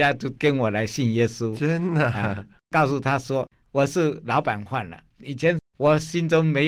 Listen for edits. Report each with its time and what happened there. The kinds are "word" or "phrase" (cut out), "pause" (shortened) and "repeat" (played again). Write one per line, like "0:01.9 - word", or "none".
0:05.1 - pause